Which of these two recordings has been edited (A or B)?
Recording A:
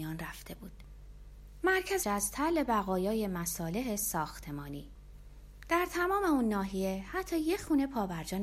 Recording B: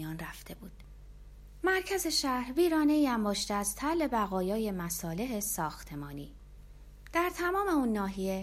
A